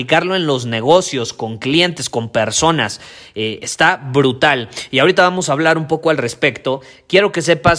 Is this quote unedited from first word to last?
yes; 0 cuts

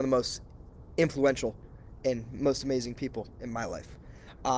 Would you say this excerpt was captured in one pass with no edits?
yes; 0 cuts

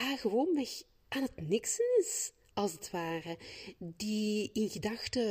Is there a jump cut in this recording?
no; 0 cuts

